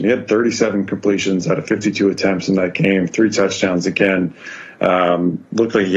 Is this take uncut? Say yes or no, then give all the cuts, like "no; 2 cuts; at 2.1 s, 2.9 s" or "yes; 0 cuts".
yes; 0 cuts